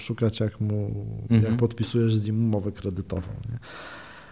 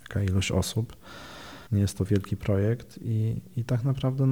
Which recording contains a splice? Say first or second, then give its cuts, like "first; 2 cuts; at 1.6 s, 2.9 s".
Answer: second; 1 cut; at 1.7 s